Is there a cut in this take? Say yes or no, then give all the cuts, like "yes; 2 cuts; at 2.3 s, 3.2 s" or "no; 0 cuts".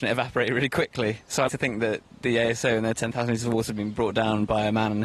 yes; 1 cut; at 1.5 s